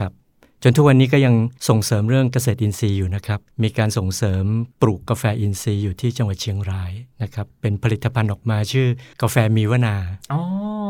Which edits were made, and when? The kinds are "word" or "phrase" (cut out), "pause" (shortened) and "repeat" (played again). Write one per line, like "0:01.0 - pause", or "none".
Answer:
0:01.6 - pause
0:03.5 - pause
0:04.7 - pause
0:07.1 - pause
0:09.1 - pause

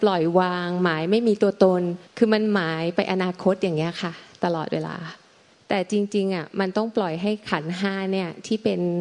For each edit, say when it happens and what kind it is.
0:02.1 - pause
0:05.5 - pause

